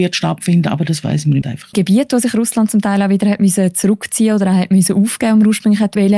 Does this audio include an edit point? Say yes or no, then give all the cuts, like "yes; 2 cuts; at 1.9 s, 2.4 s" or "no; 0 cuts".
yes; 2 cuts; at 1.4 s, 1.7 s